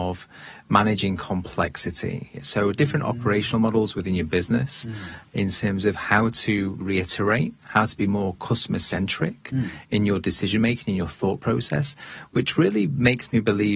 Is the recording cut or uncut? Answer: cut